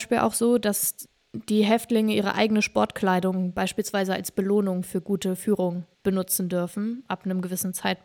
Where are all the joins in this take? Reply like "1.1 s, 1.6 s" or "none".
5.9 s